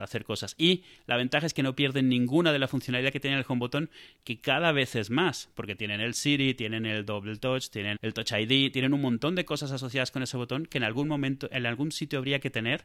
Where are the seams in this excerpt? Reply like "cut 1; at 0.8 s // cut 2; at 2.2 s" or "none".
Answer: cut 1; at 8.0 s